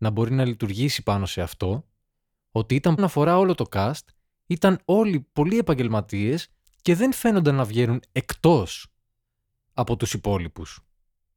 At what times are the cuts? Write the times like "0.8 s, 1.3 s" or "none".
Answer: 3.0 s